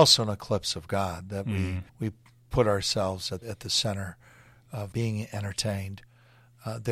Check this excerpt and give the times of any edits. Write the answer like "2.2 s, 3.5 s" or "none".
1.9 s, 3.4 s, 4.9 s